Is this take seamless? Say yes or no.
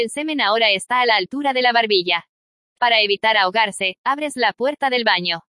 yes